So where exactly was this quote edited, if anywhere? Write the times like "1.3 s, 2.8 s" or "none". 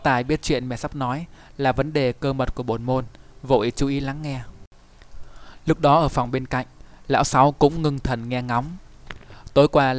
none